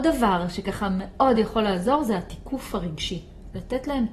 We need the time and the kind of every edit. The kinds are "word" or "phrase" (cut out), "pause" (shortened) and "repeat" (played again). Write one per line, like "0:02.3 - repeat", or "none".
none